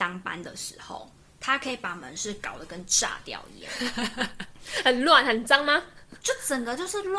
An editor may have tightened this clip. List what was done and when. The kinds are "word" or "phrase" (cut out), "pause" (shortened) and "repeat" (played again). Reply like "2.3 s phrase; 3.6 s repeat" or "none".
none